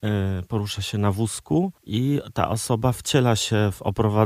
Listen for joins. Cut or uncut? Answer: cut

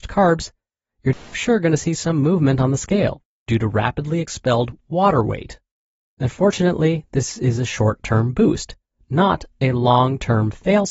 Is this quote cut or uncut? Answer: uncut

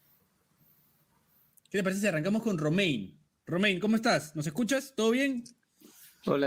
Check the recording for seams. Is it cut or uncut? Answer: uncut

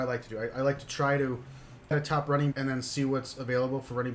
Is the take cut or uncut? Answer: cut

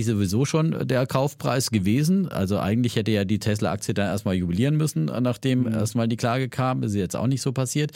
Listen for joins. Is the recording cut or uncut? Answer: uncut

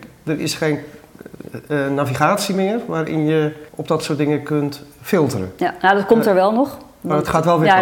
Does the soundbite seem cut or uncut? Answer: cut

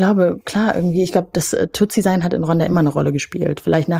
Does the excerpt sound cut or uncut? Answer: uncut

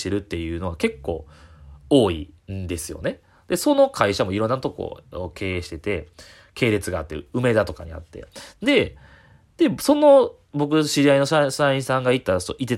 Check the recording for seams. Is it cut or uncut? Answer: cut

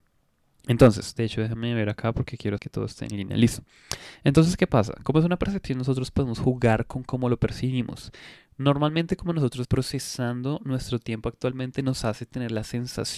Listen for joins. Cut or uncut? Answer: cut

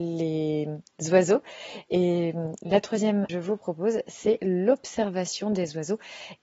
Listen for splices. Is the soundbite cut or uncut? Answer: cut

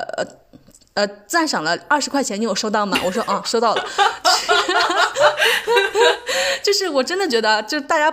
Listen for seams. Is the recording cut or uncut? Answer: uncut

